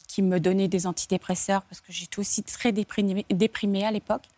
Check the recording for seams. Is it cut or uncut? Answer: uncut